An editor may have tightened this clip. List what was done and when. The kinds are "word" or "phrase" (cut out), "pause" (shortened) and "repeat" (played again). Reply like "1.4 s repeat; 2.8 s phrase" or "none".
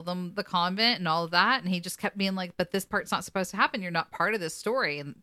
none